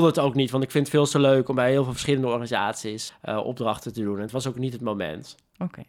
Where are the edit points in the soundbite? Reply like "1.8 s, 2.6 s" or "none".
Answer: 3.1 s

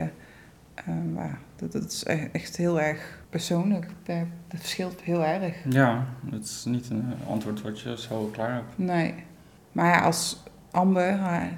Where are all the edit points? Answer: 3.2 s, 9.6 s

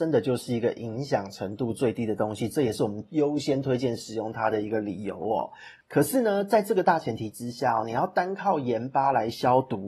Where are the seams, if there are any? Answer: none

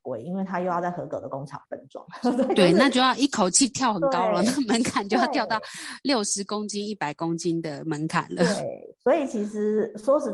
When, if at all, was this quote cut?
none

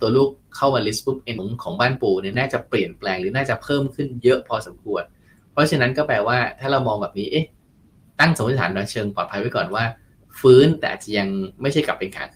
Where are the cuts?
1.4 s

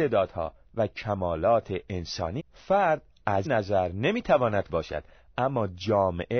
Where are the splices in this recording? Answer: 2.4 s, 3.4 s, 4.7 s

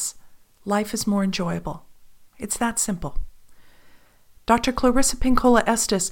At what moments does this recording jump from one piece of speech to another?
none

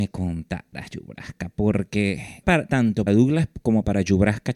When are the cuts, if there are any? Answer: 2.4 s, 3.1 s

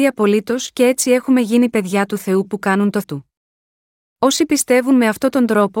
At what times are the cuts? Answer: 3.0 s

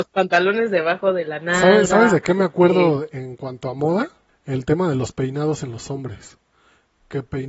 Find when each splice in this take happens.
4.3 s

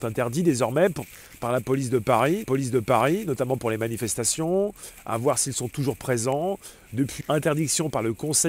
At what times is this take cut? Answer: 2.4 s, 7.2 s

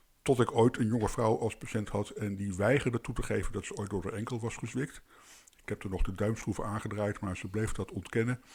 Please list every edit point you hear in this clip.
none

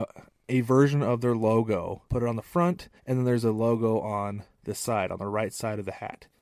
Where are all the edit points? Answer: 2.1 s, 3.0 s, 4.5 s

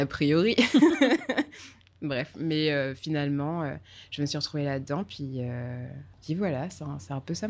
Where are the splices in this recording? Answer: 6.1 s

